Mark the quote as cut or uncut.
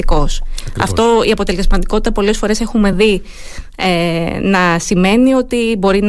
uncut